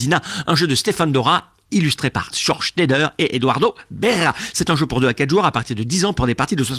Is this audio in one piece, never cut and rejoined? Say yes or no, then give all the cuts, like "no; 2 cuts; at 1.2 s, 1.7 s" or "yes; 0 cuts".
no; 1 cut; at 2.3 s